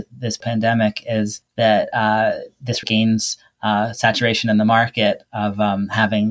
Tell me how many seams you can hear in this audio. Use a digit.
1